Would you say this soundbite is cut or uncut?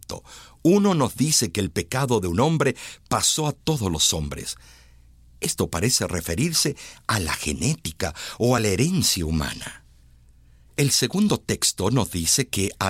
uncut